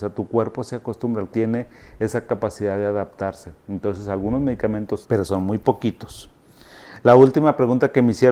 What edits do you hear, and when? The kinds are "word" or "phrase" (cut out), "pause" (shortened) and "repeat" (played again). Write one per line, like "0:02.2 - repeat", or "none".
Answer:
0:01.3 - word
0:05.0 - word